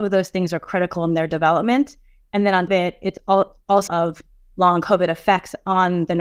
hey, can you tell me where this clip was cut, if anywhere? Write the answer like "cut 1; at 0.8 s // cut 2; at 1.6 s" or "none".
cut 1; at 2.7 s // cut 2; at 3.9 s